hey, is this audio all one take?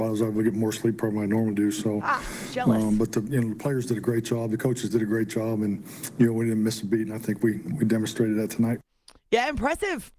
yes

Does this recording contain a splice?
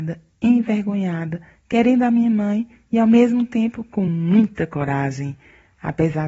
no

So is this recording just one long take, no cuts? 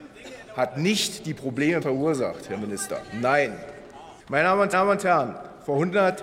no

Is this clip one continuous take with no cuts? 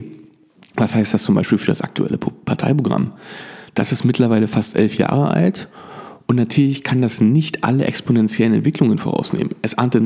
yes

